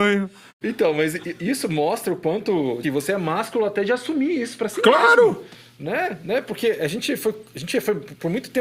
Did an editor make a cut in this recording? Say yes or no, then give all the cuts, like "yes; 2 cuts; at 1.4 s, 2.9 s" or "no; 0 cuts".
yes; 1 cut; at 2.8 s